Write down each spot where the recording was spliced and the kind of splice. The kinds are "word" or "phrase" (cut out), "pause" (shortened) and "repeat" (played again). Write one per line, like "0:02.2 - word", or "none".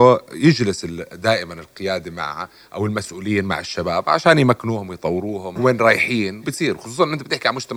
0:05.6 - word
0:06.4 - word